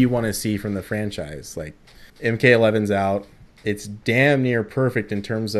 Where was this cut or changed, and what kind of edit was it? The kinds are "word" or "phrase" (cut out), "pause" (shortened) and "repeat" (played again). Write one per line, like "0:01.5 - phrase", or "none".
0:02.1 - pause